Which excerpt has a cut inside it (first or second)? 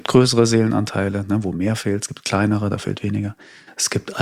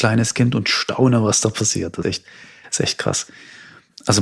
second